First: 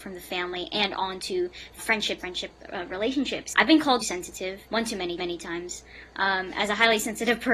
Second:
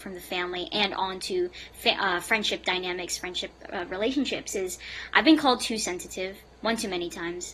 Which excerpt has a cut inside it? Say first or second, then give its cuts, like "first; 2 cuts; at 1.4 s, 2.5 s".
first; 6 cuts; at 1.8 s, 2.2 s, 3.5 s, 4.0 s, 4.7 s, 5.2 s